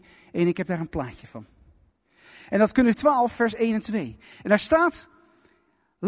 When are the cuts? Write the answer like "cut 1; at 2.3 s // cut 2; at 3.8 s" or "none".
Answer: cut 1; at 2.9 s